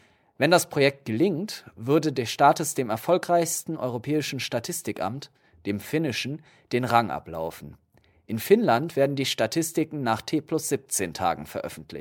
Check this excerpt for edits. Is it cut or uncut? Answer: uncut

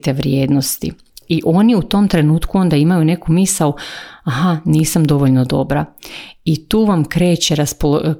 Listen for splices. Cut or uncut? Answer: uncut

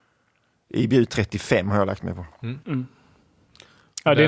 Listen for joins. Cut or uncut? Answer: cut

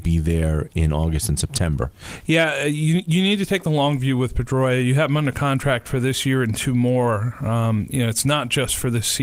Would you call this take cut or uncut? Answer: uncut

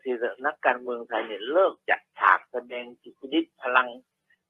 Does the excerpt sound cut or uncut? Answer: uncut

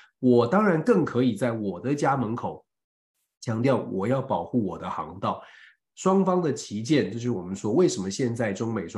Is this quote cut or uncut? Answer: uncut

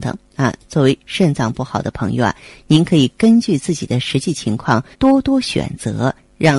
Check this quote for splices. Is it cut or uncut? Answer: cut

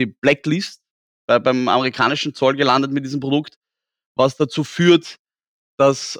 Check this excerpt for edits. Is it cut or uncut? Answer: uncut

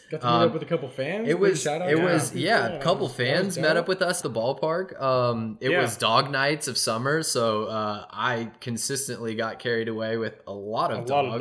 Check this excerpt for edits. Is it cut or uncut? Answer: cut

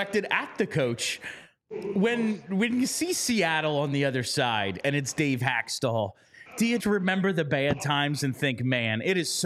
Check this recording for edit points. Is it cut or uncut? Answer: cut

